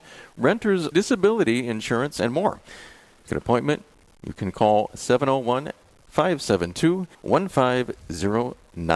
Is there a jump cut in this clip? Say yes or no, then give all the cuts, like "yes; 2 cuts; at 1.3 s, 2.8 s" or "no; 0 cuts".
yes; 3 cuts; at 0.9 s, 3.3 s, 7.1 s